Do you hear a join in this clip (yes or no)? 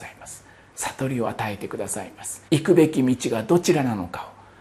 yes